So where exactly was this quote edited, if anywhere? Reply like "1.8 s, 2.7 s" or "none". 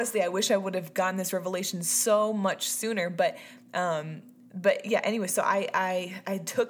none